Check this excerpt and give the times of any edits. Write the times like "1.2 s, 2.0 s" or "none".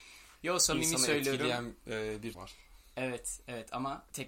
2.3 s